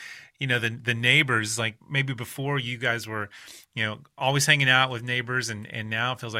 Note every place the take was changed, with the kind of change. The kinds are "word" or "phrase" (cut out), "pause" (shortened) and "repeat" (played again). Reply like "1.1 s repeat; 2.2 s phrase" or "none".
1.8 s pause